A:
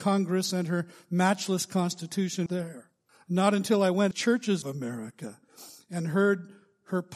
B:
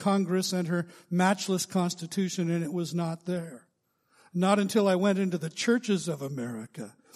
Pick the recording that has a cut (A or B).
A